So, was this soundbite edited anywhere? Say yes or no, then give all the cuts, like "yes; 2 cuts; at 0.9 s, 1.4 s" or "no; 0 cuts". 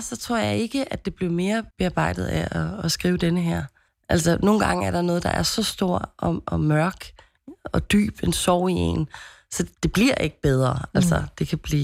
yes; 3 cuts; at 1.7 s, 3.9 s, 9.7 s